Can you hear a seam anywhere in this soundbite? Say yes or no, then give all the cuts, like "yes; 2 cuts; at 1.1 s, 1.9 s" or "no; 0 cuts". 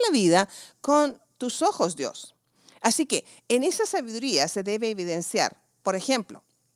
no; 0 cuts